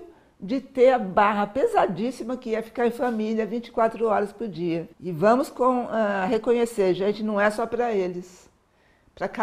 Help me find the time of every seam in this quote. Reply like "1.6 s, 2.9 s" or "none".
4.9 s